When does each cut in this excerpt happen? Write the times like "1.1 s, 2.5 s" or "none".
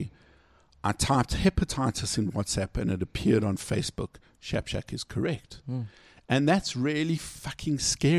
none